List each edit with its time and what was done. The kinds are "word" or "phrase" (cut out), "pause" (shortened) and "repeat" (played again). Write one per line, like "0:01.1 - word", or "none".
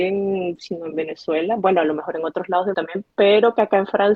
0:02.7 - word
0:03.1 - pause